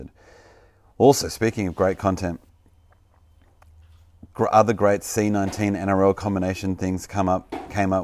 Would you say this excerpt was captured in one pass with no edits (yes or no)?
yes